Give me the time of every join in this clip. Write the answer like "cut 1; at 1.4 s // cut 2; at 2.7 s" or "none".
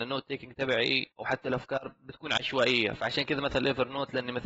cut 1; at 1.1 s